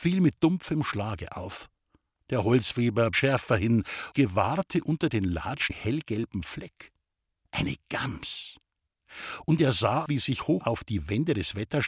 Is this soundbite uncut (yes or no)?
no